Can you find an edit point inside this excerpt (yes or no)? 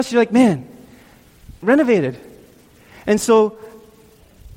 yes